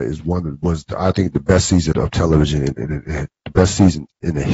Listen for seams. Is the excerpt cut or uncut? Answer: cut